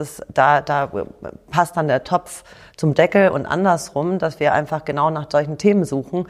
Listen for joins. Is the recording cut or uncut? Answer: uncut